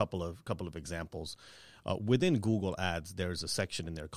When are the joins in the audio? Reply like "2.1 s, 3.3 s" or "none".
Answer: none